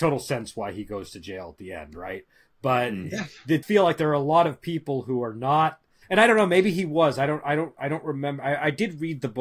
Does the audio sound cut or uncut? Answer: cut